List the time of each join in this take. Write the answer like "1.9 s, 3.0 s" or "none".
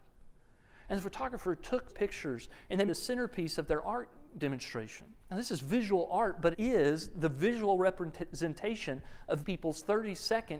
1.9 s, 2.9 s, 5.2 s, 6.5 s, 9.4 s